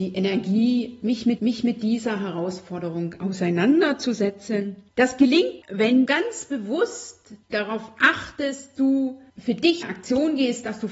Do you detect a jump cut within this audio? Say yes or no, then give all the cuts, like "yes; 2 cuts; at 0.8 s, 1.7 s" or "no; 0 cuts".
yes; 8 cuts; at 1.4 s, 4.9 s, 5.6 s, 6.1 s, 7.4 s, 8.7 s, 9.3 s, 9.8 s